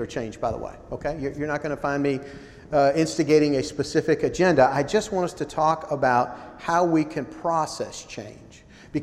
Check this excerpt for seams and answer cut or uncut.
uncut